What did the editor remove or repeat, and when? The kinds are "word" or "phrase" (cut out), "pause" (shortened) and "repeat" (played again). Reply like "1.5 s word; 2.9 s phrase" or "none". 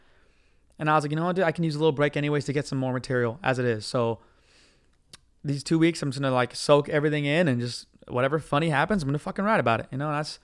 none